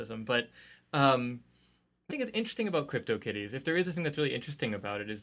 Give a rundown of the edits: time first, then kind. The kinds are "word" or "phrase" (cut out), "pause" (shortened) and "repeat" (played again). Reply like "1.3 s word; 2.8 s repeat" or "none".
2.1 s word